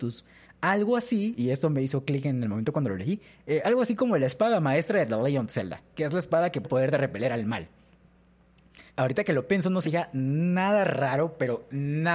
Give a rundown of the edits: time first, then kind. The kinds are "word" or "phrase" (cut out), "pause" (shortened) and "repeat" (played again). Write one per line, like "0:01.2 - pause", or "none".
0:06.6 - word
0:08.9 - pause
0:09.8 - phrase